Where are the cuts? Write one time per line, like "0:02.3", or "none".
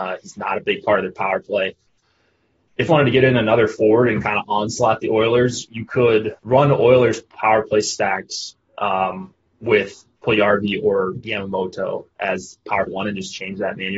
0:02.9
0:06.4
0:11.2
0:12.9